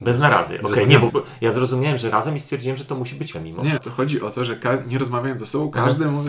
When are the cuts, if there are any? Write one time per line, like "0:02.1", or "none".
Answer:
0:01.1
0:03.3
0:03.8

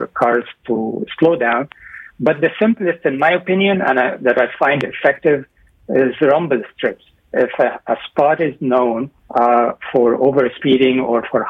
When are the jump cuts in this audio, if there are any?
0:09.2

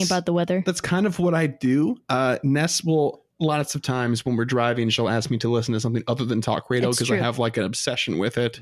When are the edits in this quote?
0:03.3

